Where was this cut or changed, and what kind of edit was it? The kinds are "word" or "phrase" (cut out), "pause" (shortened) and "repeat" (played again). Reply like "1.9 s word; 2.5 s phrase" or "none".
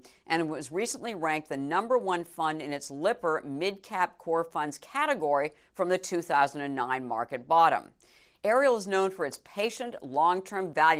none